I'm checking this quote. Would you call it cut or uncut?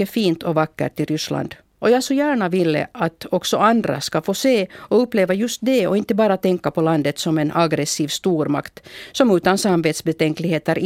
uncut